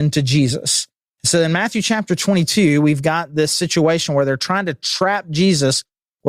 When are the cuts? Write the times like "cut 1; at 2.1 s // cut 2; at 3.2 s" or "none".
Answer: none